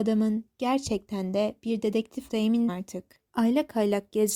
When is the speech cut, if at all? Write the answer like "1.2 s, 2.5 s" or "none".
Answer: 2.3 s, 2.7 s, 3.2 s